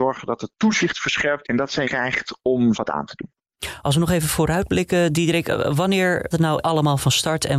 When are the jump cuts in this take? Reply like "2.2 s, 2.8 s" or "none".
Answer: 1.4 s, 1.8 s, 2.7 s, 6.3 s, 6.6 s